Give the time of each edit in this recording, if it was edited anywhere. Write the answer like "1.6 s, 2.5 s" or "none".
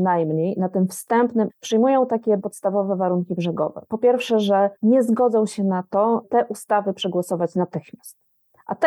1.5 s, 2.4 s, 4.8 s, 6.2 s